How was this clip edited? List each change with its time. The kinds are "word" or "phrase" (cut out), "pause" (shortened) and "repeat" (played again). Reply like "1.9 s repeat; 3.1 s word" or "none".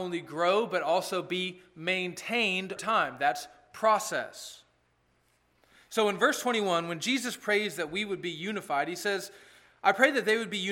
2.8 s word